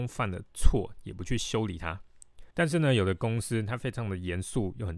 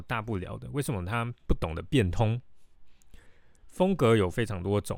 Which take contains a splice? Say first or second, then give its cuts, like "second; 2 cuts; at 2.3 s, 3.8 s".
first; 1 cut; at 2.5 s